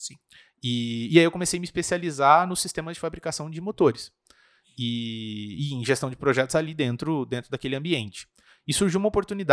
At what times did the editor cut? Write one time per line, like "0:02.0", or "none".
none